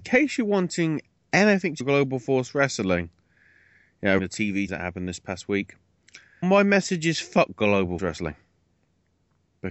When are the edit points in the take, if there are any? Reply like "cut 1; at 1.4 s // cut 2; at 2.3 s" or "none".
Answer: cut 1; at 1.8 s // cut 2; at 4.2 s // cut 3; at 4.7 s // cut 4; at 6.4 s // cut 5; at 8.0 s